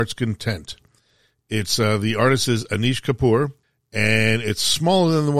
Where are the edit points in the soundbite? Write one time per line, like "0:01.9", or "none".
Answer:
0:03.6